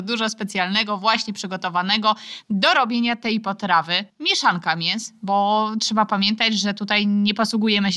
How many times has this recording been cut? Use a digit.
1